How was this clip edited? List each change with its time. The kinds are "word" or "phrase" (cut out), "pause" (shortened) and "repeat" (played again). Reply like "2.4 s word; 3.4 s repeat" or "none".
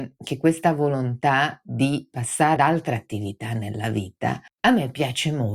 2.6 s word; 4.5 s pause